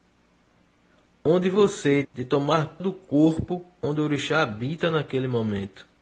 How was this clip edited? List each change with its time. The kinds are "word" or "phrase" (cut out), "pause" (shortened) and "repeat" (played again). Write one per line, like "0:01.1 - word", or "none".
0:02.0 - phrase
0:02.8 - word